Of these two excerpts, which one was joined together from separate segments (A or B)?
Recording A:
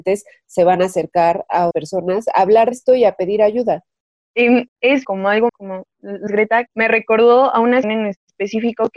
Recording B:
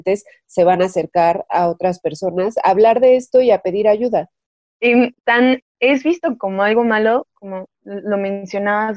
A